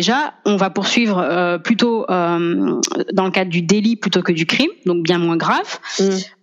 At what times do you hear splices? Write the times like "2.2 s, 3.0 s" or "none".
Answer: none